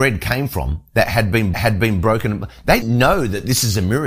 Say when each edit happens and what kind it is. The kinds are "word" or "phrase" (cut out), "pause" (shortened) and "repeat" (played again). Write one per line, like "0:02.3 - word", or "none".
0:01.5 - repeat
0:02.8 - word